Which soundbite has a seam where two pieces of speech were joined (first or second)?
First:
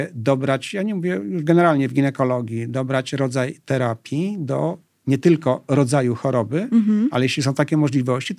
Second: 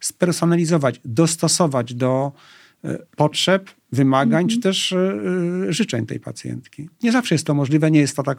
second